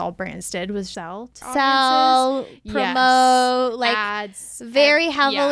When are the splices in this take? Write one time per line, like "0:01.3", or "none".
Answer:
0:00.9
0:01.4